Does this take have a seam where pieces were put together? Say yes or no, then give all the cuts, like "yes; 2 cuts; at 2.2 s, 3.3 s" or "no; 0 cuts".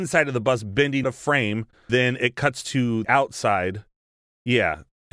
yes; 3 cuts; at 1.0 s, 1.9 s, 3.0 s